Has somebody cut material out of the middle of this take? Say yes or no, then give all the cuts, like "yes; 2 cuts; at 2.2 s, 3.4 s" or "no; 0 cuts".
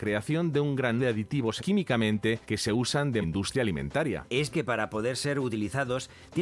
yes; 5 cuts; at 1.0 s, 1.6 s, 2.4 s, 3.2 s, 4.5 s